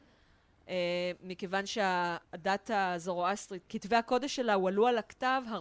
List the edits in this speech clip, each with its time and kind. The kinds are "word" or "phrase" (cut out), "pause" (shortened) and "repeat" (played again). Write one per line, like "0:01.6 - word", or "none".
0:02.2 - pause